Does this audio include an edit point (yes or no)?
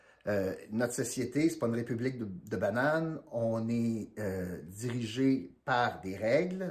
no